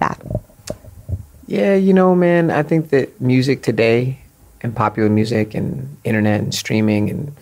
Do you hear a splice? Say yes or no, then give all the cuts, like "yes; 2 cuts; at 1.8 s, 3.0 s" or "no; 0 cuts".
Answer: no; 0 cuts